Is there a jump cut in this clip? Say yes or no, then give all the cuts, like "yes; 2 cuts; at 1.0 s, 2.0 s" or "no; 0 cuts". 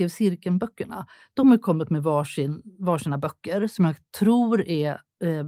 no; 0 cuts